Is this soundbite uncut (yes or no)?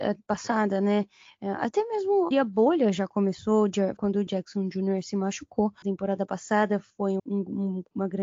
no